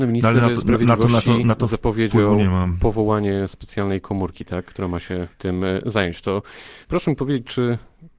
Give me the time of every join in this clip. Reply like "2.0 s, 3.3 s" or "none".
5.3 s, 6.8 s